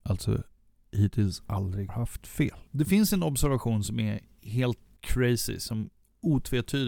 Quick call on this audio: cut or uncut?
cut